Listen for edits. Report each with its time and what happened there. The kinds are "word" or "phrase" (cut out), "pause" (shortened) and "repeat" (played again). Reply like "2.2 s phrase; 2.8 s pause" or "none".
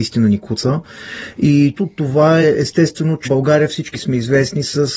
1.7 s word; 2.4 s word; 3.2 s word; 3.9 s word